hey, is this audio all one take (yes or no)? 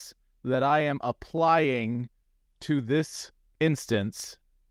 yes